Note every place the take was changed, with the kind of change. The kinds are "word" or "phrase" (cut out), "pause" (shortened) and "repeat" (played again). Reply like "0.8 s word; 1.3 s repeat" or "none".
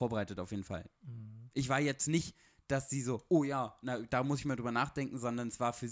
none